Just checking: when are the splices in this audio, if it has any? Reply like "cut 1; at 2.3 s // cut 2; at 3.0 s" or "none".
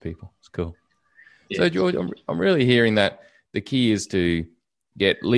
none